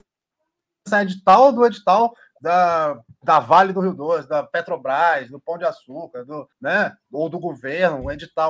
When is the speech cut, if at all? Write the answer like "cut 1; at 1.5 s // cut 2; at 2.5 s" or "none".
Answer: cut 1; at 6.5 s

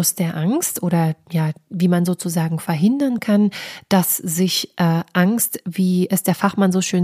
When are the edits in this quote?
none

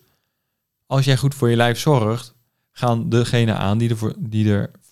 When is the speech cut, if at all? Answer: none

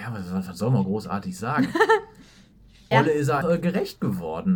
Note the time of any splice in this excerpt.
cut 1; at 2.9 s // cut 2; at 3.4 s

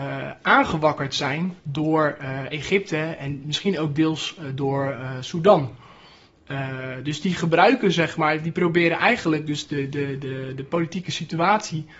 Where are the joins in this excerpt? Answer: cut 1; at 1.6 s

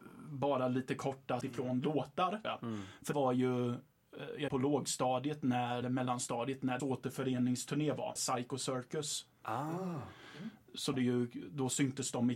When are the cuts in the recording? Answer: cut 1; at 1.4 s // cut 2; at 2.4 s // cut 3; at 3.1 s // cut 4; at 4.5 s // cut 5; at 5.8 s // cut 6; at 6.8 s // cut 7; at 8.2 s // cut 8; at 10.9 s

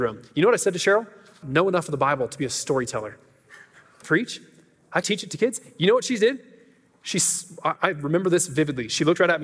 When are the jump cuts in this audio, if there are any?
cut 1; at 1.4 s // cut 2; at 4.0 s // cut 3; at 5.0 s // cut 4; at 7.8 s

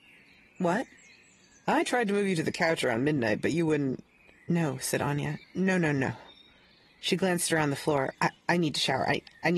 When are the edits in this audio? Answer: cut 1; at 5.4 s // cut 2; at 8.1 s

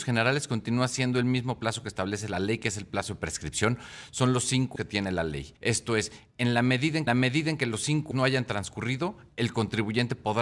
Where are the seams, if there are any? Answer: cut 1; at 4.8 s // cut 2; at 5.6 s // cut 3; at 7.1 s // cut 4; at 8.1 s

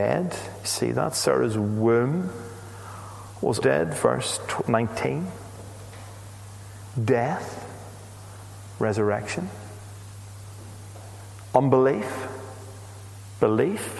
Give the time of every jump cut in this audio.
cut 1; at 3.6 s

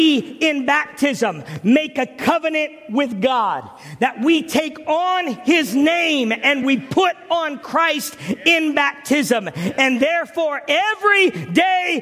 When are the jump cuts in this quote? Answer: none

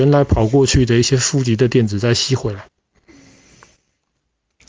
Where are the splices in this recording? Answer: none

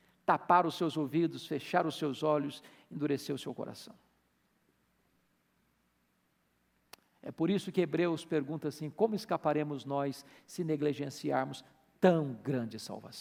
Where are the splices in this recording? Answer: none

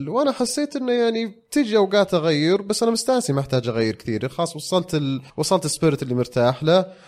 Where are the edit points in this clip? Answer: cut 1; at 5.3 s

